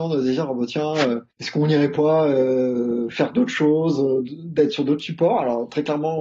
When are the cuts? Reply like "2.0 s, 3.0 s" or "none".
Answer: 1.3 s

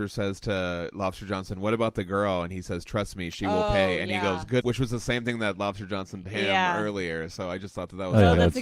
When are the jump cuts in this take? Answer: 4.6 s, 6.2 s

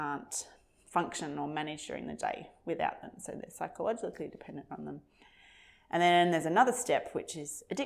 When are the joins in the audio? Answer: none

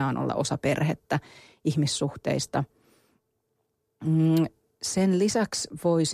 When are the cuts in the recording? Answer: none

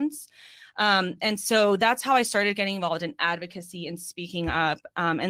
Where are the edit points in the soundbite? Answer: none

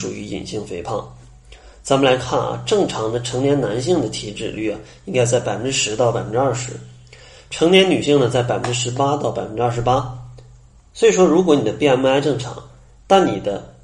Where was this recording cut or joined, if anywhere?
none

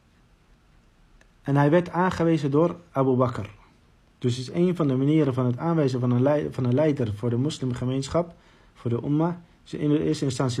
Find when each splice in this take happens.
none

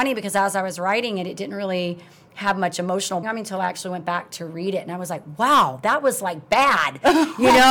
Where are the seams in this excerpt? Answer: 3.2 s

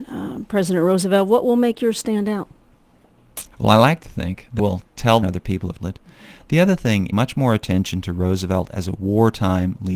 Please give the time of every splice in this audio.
3.5 s, 4.6 s, 5.2 s, 5.8 s, 7.1 s

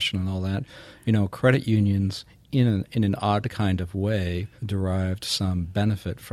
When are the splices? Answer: 4.6 s

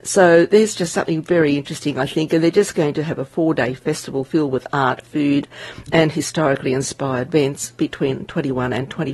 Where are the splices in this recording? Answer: none

